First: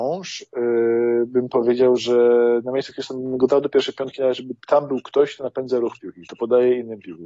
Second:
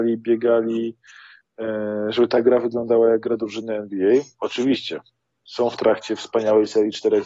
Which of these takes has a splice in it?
first; 1 cut; at 4.6 s

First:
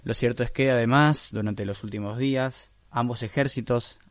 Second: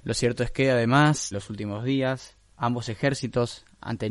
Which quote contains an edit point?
second; 1 cut; at 1.3 s

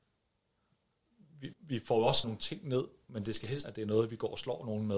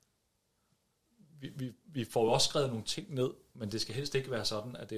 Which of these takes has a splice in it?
first; 3 cuts; at 1.5 s, 2.2 s, 3.6 s

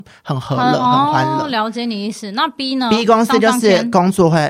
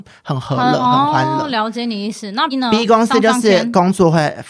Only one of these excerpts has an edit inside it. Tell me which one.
second; 1 cut; at 2.5 s

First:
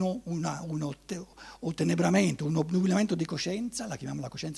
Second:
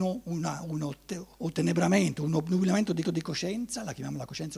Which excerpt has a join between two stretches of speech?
second; 2 cuts; at 1.3 s, 3.0 s

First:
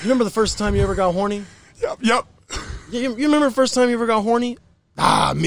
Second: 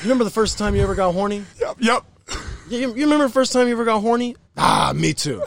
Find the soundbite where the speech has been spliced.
second; 2 cuts; at 1.5 s, 4.4 s

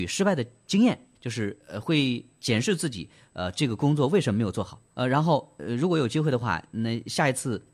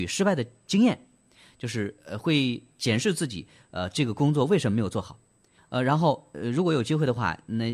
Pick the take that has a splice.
first; 2 cuts; at 1.1 s, 4.9 s

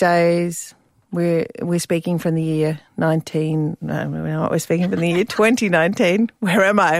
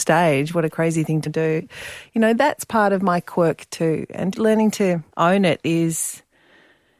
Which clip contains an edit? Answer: second; 3 cuts; at 1.3 s, 4.3 s, 5.1 s

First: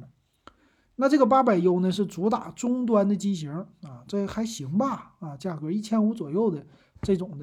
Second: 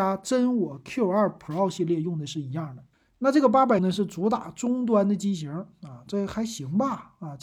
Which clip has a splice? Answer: second; 2 cuts; at 2.9 s, 3.8 s

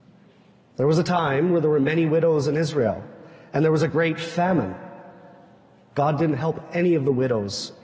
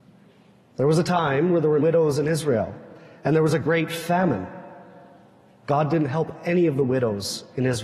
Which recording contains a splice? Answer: second; 1 cut; at 1.8 s

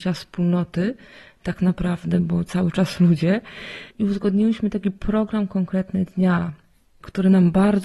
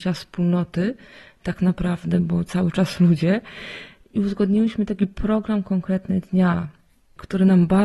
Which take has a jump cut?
first; 1 cut; at 3.9 s

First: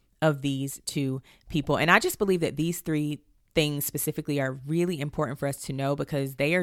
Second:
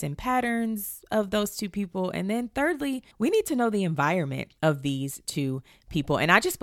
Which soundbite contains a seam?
second; 2 cuts; at 3.1 s, 4.6 s

